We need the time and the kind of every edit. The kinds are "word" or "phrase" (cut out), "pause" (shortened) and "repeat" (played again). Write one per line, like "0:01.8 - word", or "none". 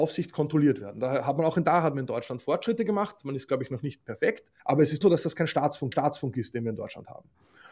0:04.6 - pause
0:05.0 - word
0:05.9 - repeat